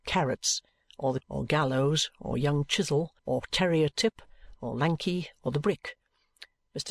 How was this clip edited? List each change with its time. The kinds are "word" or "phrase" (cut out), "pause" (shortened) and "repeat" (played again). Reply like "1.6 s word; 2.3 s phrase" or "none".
1.2 s word; 3.2 s pause

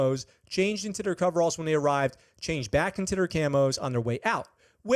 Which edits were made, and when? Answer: none

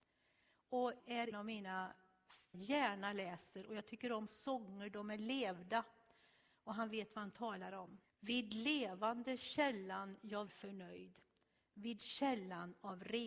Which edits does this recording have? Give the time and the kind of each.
1.0 s phrase; 1.3 s word; 2.5 s phrase; 4.3 s word; 8.0 s pause; 10.5 s word

